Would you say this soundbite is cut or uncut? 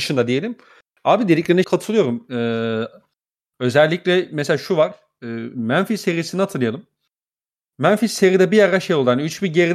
cut